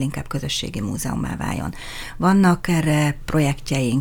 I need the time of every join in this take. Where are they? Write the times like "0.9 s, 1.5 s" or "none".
none